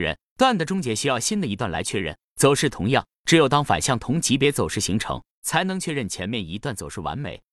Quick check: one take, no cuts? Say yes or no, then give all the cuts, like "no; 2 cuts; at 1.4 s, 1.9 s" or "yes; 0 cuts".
yes; 0 cuts